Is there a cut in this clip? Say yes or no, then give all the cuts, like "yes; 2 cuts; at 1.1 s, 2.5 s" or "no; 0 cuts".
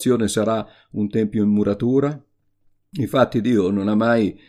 no; 0 cuts